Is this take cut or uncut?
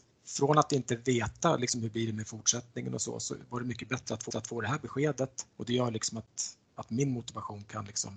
cut